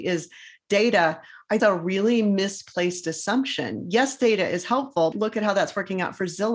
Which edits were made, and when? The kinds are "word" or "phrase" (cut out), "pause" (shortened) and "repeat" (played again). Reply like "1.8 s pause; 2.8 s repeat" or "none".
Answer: 1.6 s phrase; 5.1 s word